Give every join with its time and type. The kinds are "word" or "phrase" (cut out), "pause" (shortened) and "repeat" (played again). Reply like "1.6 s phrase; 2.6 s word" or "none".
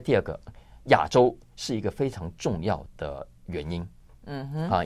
none

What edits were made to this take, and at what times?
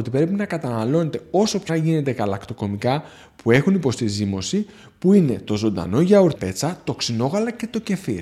1.7 s word; 6.3 s word

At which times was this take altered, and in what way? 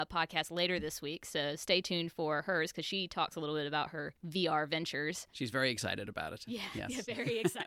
none

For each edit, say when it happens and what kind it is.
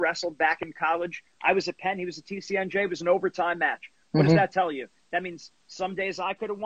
none

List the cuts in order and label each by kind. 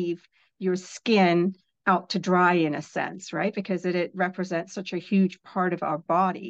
none

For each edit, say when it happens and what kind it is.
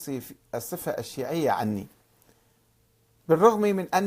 none

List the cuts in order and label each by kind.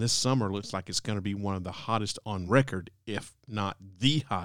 none

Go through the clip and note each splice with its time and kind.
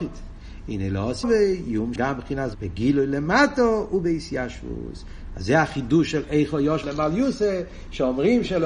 1.2 s word; 2.0 s word; 2.5 s word; 6.8 s word

